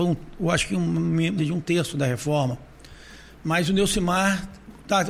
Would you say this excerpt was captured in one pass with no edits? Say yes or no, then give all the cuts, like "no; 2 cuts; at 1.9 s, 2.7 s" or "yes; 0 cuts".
no; 1 cut; at 1.4 s